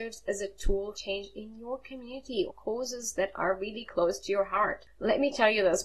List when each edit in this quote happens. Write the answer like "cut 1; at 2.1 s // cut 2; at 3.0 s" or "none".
cut 1; at 0.9 s // cut 2; at 2.5 s